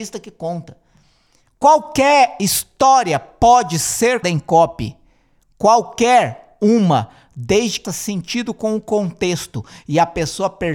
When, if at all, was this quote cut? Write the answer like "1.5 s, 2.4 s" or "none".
4.2 s, 7.8 s